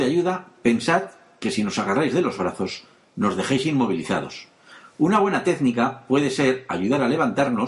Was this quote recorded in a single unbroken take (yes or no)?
yes